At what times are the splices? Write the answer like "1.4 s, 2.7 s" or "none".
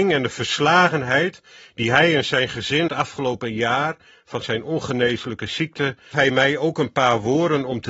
2.9 s, 6.1 s